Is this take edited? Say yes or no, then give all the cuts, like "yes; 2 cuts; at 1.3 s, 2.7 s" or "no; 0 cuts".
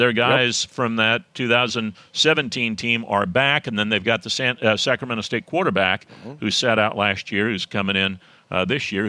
no; 0 cuts